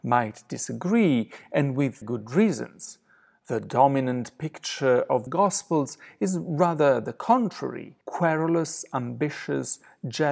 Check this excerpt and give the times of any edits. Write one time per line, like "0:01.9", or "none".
0:02.0
0:05.3
0:08.0